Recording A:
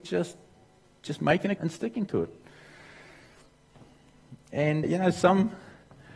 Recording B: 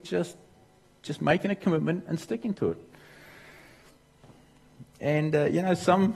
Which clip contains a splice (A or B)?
A